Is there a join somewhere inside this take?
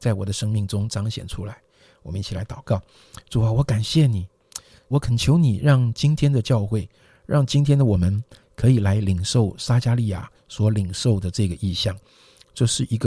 yes; 1 cut; at 4.9 s

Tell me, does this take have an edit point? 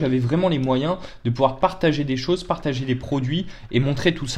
no; 0 cuts

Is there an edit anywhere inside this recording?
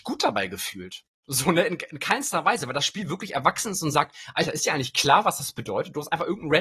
no; 0 cuts

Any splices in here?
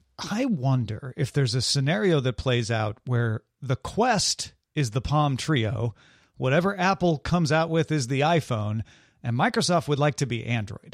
no; 0 cuts

